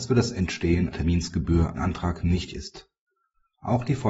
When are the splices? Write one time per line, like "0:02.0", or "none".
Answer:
0:00.9
0:01.8
0:02.5